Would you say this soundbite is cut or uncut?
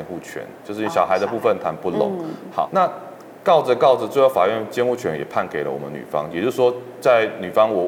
cut